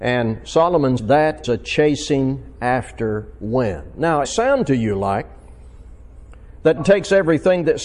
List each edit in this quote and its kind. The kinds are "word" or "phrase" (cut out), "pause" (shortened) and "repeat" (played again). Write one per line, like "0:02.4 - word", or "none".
0:01.0 - word
0:01.4 - word
0:04.2 - phrase
0:06.8 - word